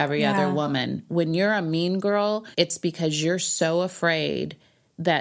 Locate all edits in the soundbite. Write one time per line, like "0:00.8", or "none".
0:02.5